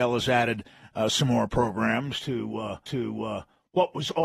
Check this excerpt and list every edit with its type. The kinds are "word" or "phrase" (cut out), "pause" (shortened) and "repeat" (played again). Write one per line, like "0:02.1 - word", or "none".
0:02.9 - repeat